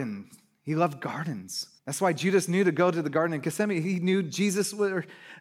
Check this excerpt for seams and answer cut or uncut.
cut